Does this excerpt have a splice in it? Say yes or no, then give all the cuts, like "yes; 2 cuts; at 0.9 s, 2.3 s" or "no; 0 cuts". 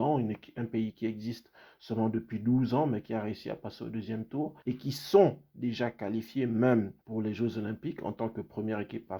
yes; 2 cuts; at 4.6 s, 7.0 s